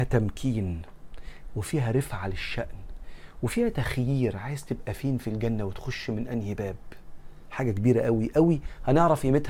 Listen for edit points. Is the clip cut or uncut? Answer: uncut